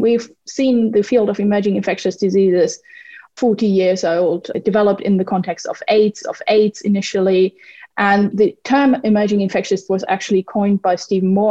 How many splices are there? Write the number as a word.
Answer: three